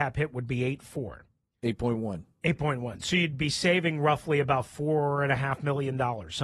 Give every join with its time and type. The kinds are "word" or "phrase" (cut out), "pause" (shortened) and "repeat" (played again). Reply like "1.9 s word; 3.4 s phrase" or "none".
none